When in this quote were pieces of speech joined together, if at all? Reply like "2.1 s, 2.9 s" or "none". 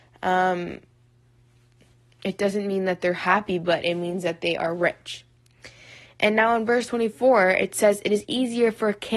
none